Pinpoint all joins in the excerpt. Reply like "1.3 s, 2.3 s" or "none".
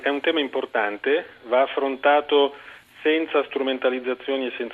none